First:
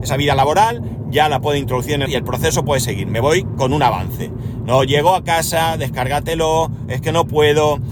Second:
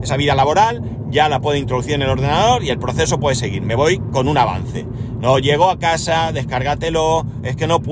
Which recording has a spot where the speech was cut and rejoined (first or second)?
first